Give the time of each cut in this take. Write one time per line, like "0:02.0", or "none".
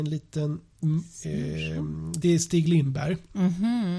0:02.2